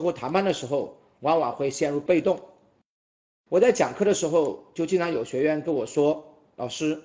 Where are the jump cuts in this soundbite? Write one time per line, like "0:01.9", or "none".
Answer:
none